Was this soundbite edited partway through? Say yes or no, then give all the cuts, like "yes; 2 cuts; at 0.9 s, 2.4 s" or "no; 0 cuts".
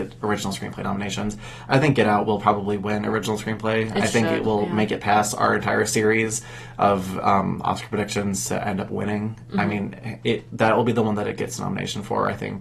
no; 0 cuts